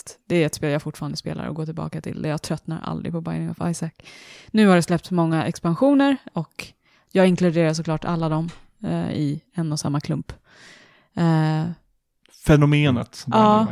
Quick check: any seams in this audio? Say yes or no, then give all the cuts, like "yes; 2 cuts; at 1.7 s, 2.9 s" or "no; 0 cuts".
no; 0 cuts